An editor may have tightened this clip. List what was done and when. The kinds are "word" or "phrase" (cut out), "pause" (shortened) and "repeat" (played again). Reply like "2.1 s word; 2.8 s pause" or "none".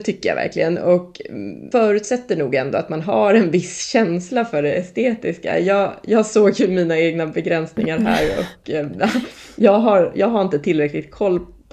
1.7 s word